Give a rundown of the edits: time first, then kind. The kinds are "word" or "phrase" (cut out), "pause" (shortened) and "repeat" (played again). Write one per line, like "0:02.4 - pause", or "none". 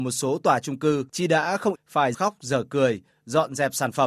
0:01.1 - pause
0:01.7 - phrase
0:02.1 - word